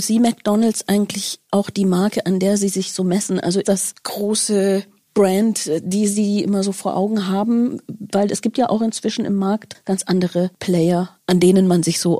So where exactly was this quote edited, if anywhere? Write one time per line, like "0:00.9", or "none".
0:03.6
0:04.0